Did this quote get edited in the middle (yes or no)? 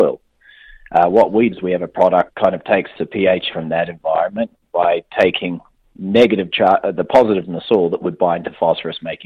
yes